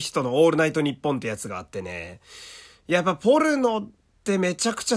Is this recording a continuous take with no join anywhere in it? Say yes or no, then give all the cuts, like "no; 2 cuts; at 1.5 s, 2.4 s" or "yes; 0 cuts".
yes; 0 cuts